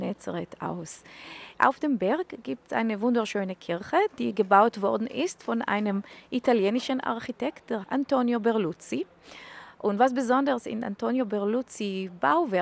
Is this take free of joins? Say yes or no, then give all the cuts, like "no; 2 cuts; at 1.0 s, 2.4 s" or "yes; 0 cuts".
no; 1 cut; at 7.8 s